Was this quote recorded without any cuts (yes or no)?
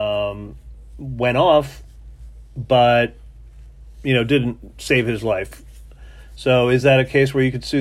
yes